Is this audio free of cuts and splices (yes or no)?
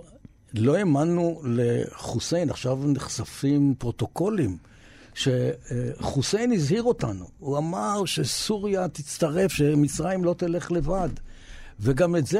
yes